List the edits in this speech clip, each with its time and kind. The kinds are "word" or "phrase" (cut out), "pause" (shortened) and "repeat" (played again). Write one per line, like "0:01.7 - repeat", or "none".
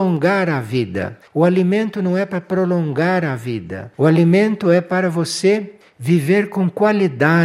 0:01.3 - pause
0:03.9 - pause